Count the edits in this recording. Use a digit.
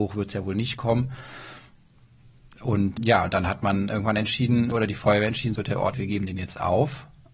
4